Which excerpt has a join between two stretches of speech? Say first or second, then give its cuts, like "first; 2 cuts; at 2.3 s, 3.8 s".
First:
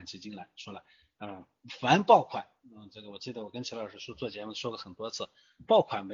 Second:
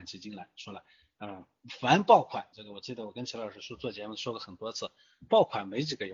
second; 1 cut; at 2.5 s